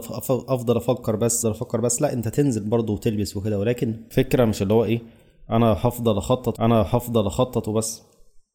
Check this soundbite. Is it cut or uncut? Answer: cut